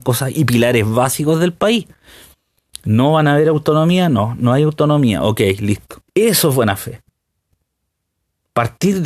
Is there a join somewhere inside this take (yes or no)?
yes